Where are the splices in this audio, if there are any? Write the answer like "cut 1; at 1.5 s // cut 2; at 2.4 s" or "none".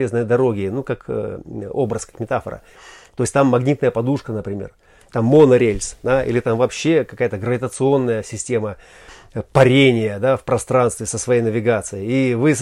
none